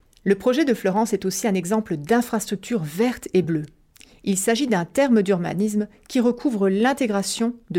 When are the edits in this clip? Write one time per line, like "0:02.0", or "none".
none

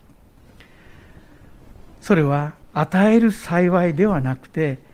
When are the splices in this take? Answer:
0:02.6

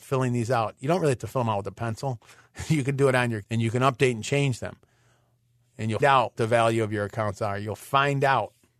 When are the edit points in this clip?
0:03.4
0:06.0
0:06.3

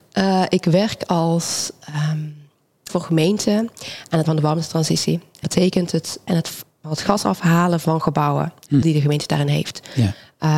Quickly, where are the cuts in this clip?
0:02.9
0:04.3
0:05.4
0:06.3
0:06.8
0:08.8

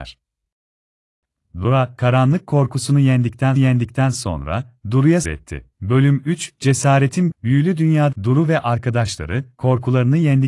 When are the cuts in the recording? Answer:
0:03.6
0:05.2
0:05.7
0:07.3
0:08.1

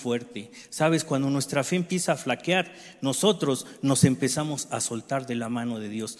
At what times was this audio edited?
none

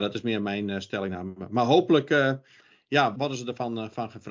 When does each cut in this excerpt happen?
0:03.1

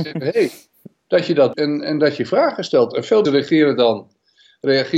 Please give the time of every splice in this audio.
0:01.5
0:03.2

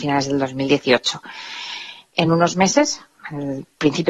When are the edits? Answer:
none

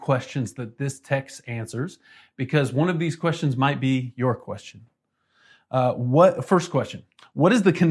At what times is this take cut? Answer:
none

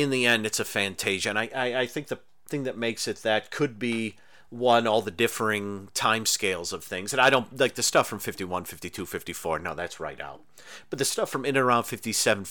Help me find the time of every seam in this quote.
none

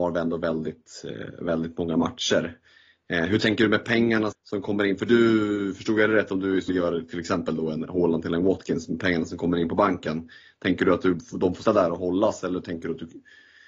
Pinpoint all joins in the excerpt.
0:04.3
0:06.7
0:11.7

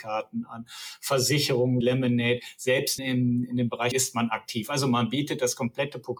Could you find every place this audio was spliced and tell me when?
0:01.8
0:03.0
0:03.9

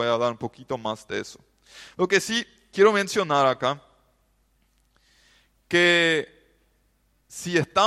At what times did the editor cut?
none

